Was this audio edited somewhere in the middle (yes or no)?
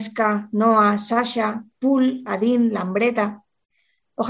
no